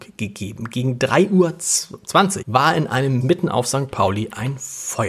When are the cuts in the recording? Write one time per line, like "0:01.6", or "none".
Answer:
0:02.4
0:03.2